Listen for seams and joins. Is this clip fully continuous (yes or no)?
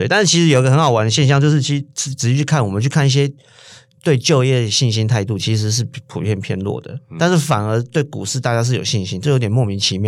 yes